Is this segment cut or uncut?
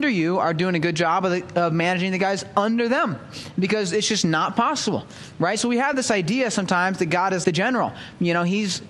cut